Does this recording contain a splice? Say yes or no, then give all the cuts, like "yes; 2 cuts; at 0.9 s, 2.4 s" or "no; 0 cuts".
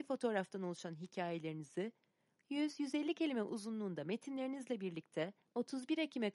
no; 0 cuts